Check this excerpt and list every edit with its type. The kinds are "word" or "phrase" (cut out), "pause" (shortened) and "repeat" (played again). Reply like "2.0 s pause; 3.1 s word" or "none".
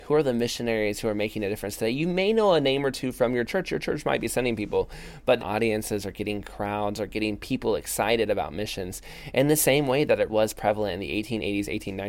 5.4 s phrase; 10.3 s word